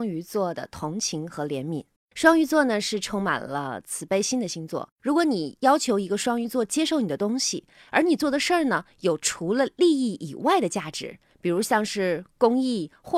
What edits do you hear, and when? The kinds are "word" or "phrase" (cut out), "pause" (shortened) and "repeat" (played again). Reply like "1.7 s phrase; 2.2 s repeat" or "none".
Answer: 2.0 s pause; 4.9 s pause